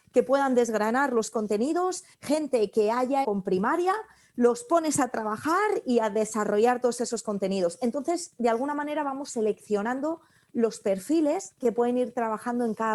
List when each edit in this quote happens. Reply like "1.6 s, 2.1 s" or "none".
2.1 s, 3.2 s